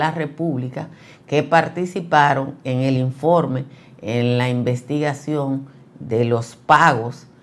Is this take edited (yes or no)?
no